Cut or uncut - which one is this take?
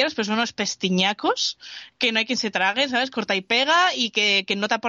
uncut